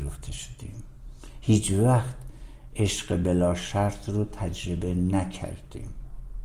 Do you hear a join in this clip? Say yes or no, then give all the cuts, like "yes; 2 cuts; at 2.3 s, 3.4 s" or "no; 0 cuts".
no; 0 cuts